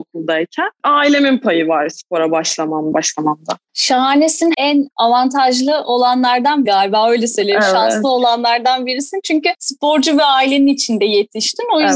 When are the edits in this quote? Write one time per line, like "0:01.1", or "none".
0:02.9
0:04.5
0:06.7